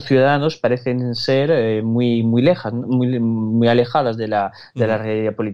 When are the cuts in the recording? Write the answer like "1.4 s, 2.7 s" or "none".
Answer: none